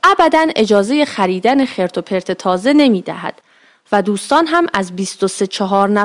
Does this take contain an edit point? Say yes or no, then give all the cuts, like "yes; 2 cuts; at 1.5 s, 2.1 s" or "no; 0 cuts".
no; 0 cuts